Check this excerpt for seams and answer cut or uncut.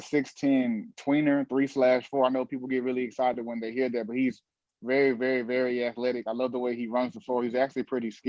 uncut